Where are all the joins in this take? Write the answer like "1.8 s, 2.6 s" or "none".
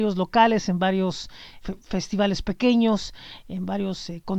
1.6 s